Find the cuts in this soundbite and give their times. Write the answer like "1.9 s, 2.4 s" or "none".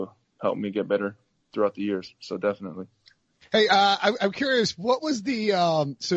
none